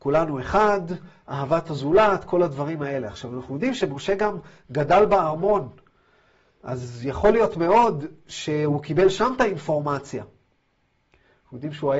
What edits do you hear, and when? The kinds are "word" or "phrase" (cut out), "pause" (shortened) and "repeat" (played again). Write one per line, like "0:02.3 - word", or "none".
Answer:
none